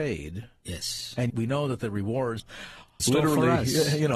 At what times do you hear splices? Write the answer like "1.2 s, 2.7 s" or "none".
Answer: 1.3 s, 2.4 s, 3.0 s